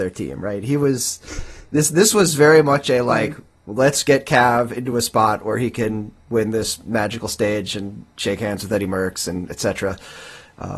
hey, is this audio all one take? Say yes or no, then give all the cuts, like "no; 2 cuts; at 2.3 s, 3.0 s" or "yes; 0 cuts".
yes; 0 cuts